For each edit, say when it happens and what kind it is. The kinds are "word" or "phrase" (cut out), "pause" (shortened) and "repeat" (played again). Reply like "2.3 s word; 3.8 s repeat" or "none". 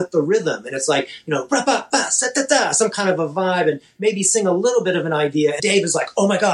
5.6 s word